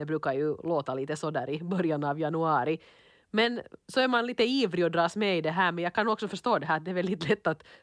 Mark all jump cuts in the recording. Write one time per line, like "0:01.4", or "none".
none